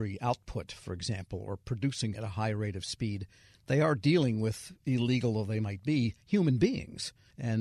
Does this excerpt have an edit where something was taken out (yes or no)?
yes